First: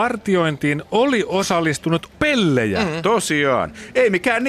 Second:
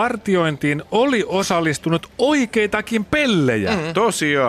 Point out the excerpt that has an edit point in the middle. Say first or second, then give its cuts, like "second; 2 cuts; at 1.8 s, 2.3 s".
first; 1 cut; at 2.1 s